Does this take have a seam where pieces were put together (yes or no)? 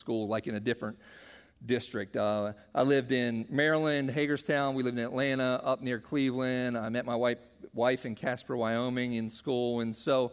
no